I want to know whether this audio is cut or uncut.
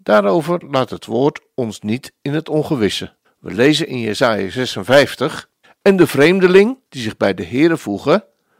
cut